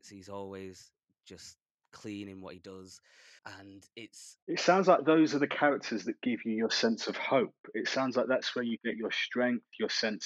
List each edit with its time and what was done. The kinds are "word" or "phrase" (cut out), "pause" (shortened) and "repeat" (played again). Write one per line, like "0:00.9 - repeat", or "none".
0:03.4 - pause
0:04.4 - pause